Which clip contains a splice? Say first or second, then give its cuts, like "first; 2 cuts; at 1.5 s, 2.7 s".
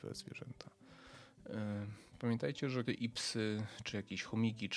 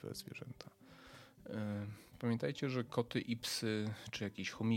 first; 1 cut; at 2.8 s